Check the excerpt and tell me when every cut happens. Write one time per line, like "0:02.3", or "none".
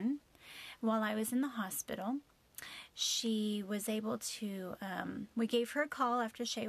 none